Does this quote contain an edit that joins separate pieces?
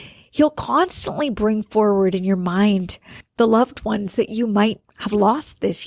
yes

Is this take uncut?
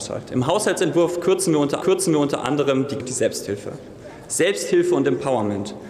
no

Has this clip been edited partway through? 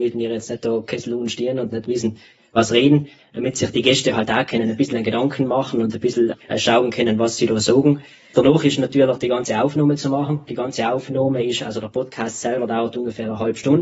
no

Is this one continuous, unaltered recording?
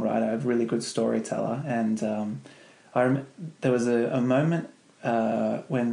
yes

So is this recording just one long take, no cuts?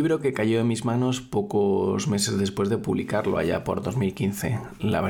yes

